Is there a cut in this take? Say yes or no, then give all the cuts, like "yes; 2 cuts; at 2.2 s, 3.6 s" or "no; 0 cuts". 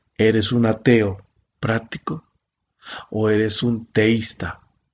no; 0 cuts